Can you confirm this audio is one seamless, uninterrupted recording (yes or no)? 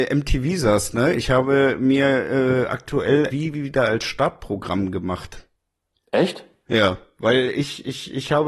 no